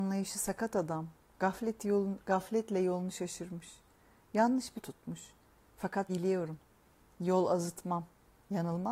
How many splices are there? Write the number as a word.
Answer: two